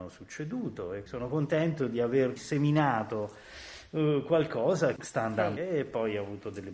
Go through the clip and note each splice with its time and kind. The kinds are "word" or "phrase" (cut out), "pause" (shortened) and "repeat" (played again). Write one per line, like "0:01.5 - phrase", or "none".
0:01.1 - word
0:02.4 - word
0:05.0 - word
0:05.6 - word

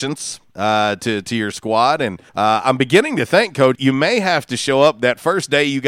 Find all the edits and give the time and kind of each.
0:02.3 - pause
0:03.7 - word

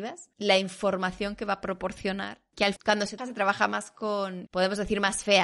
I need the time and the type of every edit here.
0:02.8 - word
0:03.2 - word
0:04.5 - word

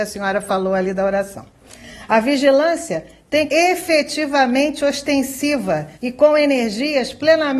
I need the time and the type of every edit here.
0:03.5 - phrase
0:05.9 - pause

